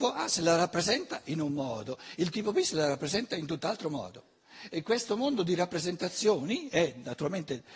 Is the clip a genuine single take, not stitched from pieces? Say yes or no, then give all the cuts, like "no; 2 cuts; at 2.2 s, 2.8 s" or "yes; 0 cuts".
yes; 0 cuts